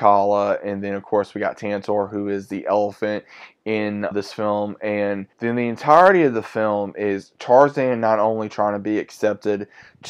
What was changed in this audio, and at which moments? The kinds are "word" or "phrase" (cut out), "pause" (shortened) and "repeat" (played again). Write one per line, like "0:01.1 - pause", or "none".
0:04.1 - word
0:05.3 - pause